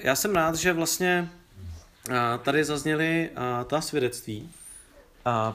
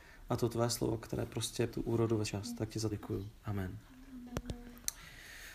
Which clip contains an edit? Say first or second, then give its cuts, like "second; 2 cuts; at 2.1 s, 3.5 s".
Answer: second; 3 cuts; at 1.7 s, 2.2 s, 2.9 s